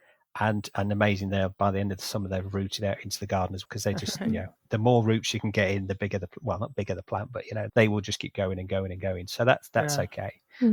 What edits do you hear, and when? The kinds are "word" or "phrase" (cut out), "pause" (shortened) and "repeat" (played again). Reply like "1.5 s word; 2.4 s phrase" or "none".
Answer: 3.6 s word; 7.7 s word